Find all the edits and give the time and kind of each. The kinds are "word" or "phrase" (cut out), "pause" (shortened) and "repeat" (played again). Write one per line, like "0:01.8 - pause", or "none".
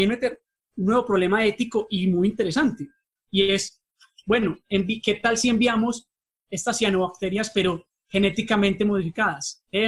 none